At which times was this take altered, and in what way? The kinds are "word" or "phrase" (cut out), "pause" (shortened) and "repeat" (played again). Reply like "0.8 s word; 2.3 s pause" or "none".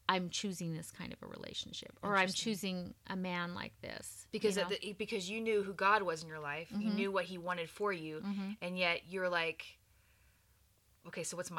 none

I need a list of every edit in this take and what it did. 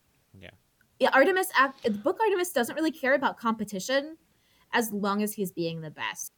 none

